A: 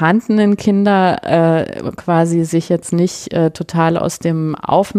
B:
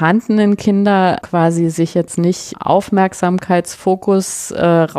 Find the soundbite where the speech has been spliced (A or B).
B